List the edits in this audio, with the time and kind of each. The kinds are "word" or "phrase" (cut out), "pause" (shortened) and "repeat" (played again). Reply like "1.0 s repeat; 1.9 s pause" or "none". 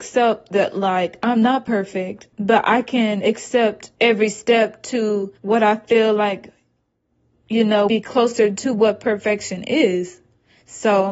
2.3 s pause; 3.9 s pause; 5.4 s pause; 7.9 s word

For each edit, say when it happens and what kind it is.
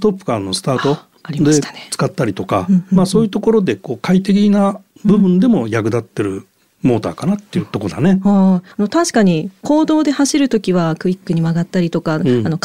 8.7 s pause

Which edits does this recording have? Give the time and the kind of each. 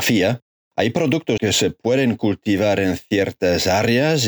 1.4 s word

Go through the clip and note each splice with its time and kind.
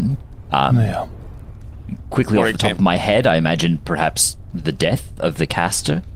none

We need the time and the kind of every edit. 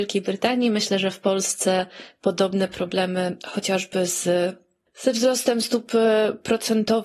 none

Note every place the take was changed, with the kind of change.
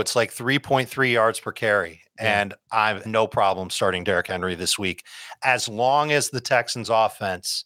3.0 s word

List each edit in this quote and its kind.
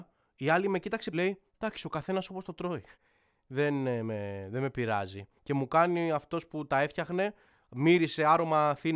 1.1 s phrase; 1.5 s pause; 2.9 s pause; 5.4 s pause

